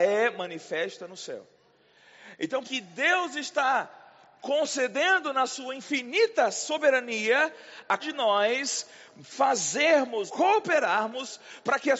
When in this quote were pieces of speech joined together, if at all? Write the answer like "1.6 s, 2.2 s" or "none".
2.6 s, 8.0 s, 10.3 s